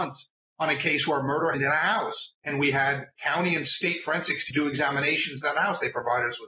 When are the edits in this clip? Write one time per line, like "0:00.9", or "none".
0:01.5
0:02.4
0:03.2
0:04.5